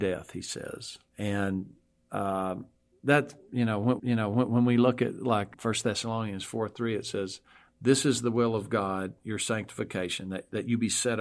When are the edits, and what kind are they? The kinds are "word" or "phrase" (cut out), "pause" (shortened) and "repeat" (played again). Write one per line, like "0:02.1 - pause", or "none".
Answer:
0:01.1 - pause
0:02.9 - word
0:04.0 - repeat
0:05.5 - word